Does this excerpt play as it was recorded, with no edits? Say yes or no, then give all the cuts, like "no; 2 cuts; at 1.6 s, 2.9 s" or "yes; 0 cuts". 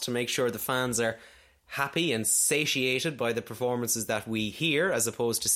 yes; 0 cuts